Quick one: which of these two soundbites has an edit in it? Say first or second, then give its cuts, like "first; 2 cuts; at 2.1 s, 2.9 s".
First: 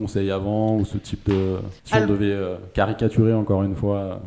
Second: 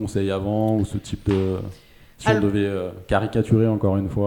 first; 1 cut; at 1.8 s